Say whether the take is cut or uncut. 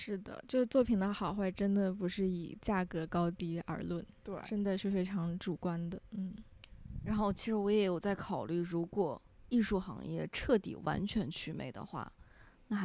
uncut